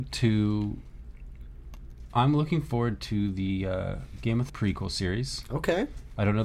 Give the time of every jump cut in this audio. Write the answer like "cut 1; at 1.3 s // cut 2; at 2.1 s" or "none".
cut 1; at 4.5 s